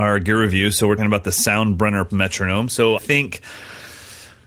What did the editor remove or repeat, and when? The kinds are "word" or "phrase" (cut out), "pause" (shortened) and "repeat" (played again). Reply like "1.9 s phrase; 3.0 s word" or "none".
1.0 s word; 2.1 s word; 3.0 s word